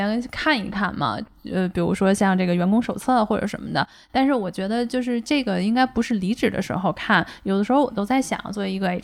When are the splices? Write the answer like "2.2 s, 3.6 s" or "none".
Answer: none